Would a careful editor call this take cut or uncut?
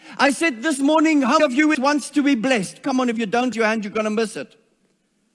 cut